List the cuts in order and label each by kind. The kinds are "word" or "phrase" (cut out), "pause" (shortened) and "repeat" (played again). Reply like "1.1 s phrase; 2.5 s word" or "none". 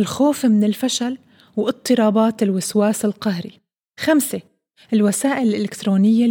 none